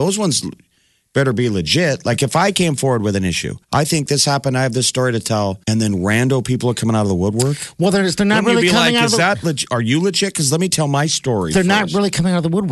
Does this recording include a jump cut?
yes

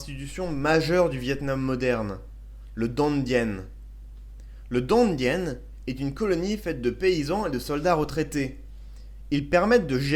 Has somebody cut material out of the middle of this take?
no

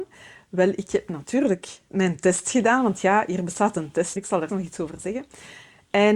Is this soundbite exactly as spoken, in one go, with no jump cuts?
no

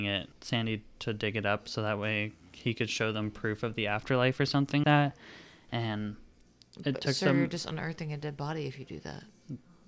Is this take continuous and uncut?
no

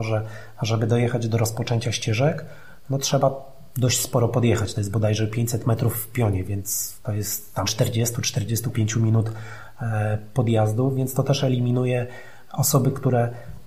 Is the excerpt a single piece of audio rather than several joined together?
no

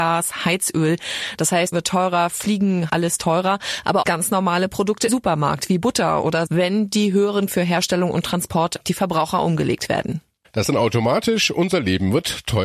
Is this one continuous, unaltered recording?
no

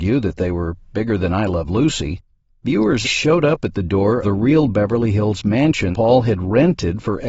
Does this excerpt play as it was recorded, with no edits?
no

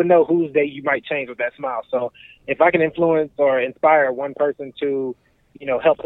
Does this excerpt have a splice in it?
no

